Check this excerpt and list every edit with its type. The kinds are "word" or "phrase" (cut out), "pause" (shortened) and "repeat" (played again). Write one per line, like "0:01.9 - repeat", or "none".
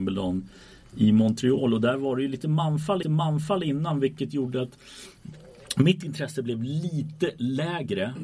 0:03.0 - repeat